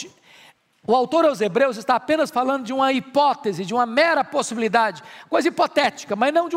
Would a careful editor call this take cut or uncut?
uncut